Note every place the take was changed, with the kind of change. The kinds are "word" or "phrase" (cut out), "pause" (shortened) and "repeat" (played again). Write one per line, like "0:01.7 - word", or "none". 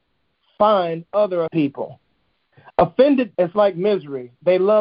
0:01.5 - word
0:03.3 - word